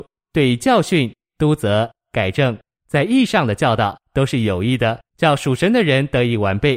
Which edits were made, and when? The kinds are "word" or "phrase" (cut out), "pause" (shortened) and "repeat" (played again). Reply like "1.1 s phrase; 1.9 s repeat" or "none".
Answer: 5.1 s pause